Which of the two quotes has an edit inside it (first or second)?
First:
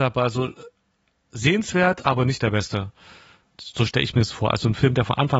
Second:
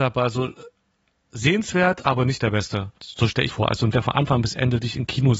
second